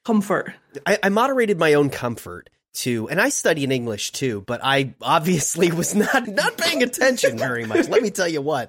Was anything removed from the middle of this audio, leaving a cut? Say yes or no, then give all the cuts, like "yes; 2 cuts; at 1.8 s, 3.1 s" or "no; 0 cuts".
yes; 1 cut; at 6.2 s